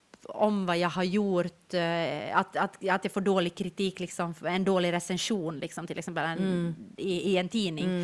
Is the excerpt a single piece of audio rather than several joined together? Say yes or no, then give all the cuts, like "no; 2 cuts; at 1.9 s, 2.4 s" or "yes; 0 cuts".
yes; 0 cuts